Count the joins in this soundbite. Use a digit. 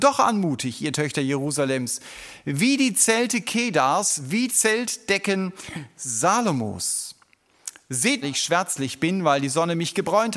2